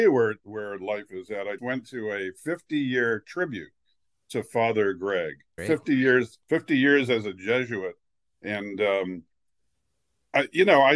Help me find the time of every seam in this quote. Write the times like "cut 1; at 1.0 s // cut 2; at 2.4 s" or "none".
cut 1; at 1.6 s // cut 2; at 5.6 s // cut 3; at 6.4 s